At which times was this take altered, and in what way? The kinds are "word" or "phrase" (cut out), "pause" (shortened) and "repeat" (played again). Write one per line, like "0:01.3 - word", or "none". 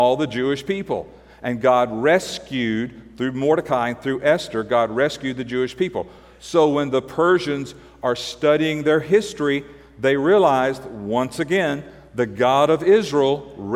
none